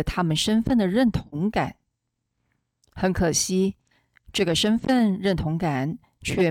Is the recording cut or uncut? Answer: uncut